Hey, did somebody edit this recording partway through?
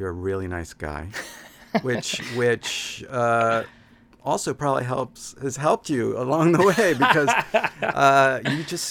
no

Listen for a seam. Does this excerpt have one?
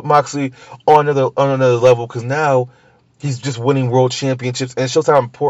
no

